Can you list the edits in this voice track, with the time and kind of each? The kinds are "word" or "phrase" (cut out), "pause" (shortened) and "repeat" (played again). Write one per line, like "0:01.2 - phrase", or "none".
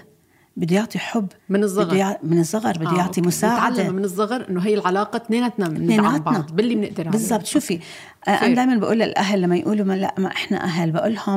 0:01.4 - pause